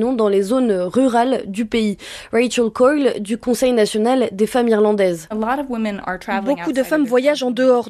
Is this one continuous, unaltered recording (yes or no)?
yes